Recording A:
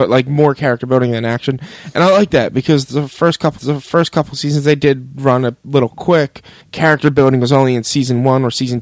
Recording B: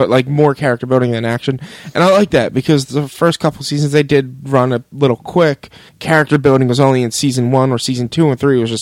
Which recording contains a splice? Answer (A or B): A